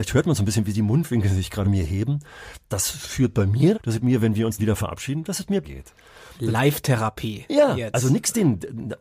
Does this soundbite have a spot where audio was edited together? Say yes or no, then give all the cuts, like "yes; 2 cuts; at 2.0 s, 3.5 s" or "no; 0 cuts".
yes; 4 cuts; at 1.6 s, 3.7 s, 4.6 s, 5.6 s